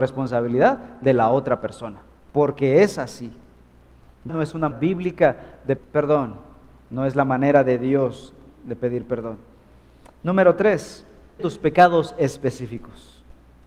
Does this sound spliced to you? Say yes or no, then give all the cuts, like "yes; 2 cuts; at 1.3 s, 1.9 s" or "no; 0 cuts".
yes; 4 cuts; at 4.3 s, 4.7 s, 5.8 s, 11.4 s